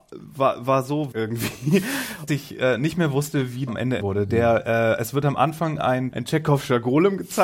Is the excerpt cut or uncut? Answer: cut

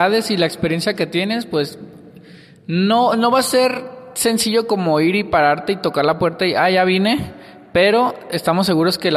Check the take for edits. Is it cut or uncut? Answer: uncut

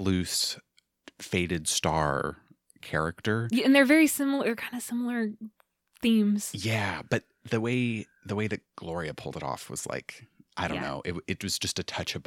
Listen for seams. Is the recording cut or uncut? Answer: uncut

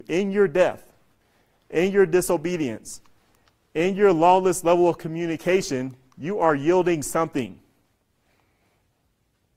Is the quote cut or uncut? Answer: uncut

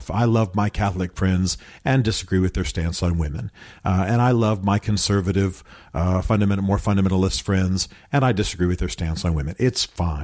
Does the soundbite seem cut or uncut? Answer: uncut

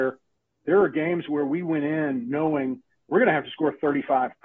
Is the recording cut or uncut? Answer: uncut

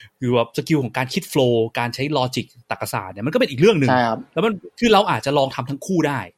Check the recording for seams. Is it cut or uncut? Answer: uncut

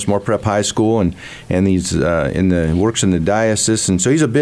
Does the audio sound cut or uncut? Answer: uncut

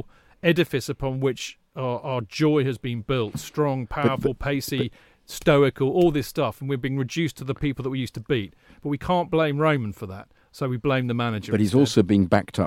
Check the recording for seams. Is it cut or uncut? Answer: uncut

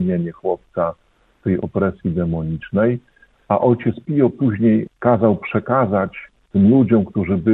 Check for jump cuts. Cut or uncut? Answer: uncut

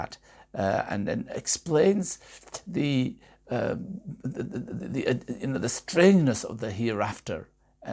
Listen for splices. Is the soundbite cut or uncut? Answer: uncut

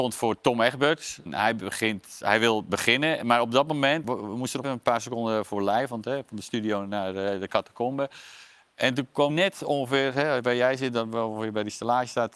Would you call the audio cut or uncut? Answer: cut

